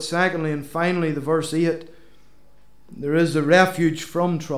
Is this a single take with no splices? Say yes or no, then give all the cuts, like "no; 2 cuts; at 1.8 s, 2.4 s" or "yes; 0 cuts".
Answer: yes; 0 cuts